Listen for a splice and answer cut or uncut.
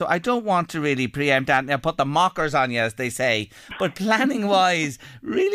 uncut